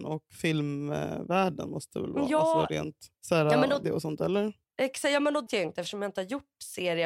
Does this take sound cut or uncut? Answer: cut